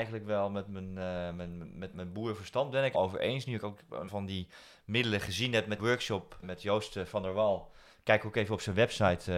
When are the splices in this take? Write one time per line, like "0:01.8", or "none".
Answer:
0:01.9
0:02.9
0:04.1
0:05.8
0:06.4